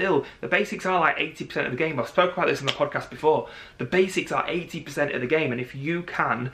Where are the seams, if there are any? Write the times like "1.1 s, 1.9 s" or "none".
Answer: none